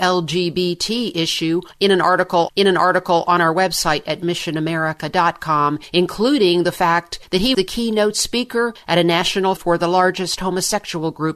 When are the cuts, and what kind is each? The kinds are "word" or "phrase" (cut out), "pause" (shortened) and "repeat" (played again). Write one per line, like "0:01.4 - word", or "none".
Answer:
0:02.5 - repeat
0:07.5 - word
0:09.6 - word